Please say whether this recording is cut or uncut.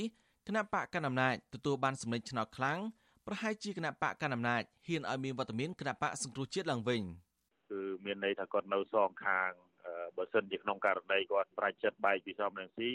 uncut